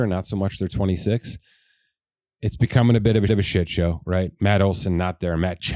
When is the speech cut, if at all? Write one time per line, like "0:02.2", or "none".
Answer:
0:03.3